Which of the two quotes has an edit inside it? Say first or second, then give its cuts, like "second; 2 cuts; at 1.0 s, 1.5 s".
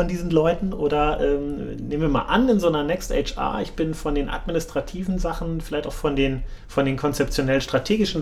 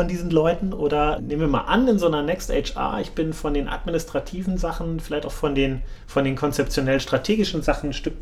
second; 1 cut; at 1.2 s